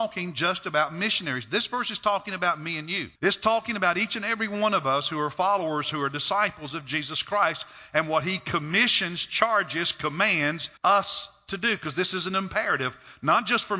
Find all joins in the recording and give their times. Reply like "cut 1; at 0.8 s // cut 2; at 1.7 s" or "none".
cut 1; at 3.2 s // cut 2; at 10.8 s